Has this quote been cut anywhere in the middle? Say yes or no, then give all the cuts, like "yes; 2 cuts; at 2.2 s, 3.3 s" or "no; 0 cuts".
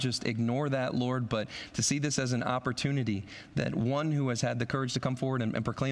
no; 0 cuts